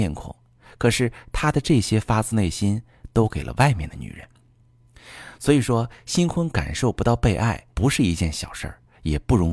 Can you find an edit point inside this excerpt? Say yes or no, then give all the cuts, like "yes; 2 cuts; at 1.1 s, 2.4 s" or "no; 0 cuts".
yes; 1 cut; at 7.7 s